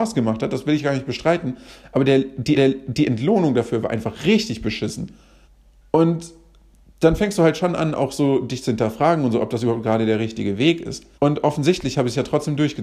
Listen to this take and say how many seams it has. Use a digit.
3